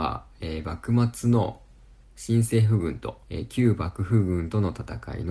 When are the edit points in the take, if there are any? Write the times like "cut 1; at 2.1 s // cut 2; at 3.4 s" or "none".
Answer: cut 1; at 3.2 s